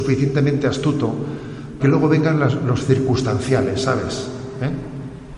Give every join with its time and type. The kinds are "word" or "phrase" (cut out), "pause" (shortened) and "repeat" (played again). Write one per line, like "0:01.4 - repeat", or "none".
0:01.8 - word